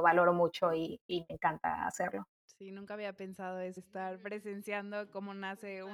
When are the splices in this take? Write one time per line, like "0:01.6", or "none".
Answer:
0:02.3
0:03.8